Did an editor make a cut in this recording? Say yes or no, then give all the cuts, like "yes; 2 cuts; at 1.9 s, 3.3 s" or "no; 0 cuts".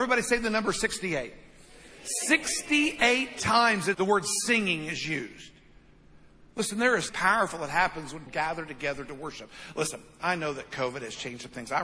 yes; 3 cuts; at 3.9 s, 7.1 s, 8.3 s